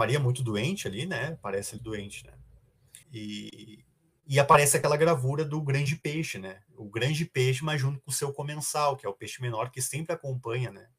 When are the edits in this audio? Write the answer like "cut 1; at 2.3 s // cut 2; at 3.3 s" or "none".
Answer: cut 1; at 1.8 s // cut 2; at 3.0 s // cut 3; at 6.7 s